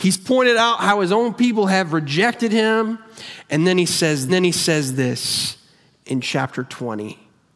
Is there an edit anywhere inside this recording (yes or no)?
yes